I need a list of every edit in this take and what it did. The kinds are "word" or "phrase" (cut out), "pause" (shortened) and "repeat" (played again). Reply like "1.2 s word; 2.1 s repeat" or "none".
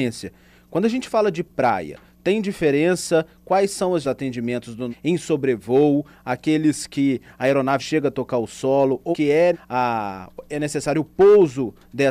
4.0 s phrase; 4.9 s word; 7.8 s word; 9.1 s word; 9.5 s word